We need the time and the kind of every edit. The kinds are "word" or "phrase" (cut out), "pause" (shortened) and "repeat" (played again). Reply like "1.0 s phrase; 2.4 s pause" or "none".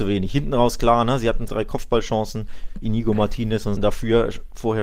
1.5 s word; 3.8 s phrase